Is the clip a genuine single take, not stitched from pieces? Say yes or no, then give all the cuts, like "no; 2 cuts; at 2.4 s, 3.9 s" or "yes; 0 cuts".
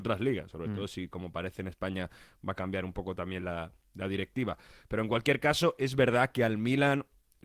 yes; 0 cuts